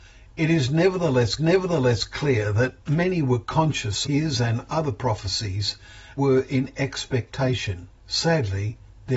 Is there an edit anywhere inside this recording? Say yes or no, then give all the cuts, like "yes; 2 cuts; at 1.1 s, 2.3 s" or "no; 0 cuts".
yes; 5 cuts; at 1.4 s, 2.8 s, 4.0 s, 6.2 s, 8.0 s